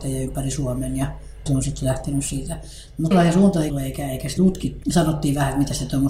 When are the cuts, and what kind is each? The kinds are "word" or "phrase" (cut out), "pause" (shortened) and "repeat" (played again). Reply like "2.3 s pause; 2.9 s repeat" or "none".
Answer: 1.5 s word; 3.1 s word; 3.7 s phrase; 4.4 s word; 4.8 s word